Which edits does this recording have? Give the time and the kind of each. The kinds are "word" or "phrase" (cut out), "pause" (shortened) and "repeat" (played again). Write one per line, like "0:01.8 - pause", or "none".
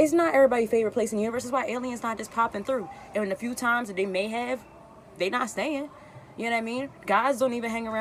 none